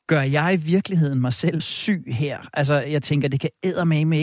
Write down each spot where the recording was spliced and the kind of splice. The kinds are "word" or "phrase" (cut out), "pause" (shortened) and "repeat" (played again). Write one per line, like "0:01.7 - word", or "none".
0:01.6 - word